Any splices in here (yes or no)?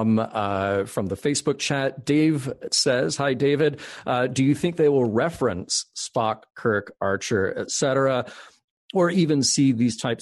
yes